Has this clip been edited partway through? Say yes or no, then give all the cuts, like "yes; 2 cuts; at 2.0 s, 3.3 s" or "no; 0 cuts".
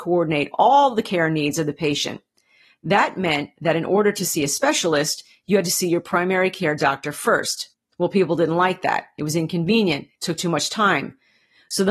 yes; 1 cut; at 7.7 s